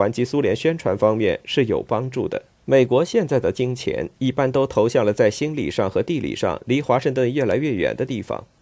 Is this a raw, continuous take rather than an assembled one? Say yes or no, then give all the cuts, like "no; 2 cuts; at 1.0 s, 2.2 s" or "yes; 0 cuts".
no; 1 cut; at 2.5 s